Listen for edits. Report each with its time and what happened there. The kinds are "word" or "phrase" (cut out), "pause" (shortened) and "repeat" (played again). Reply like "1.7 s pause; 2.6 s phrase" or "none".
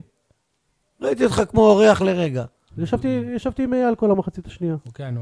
none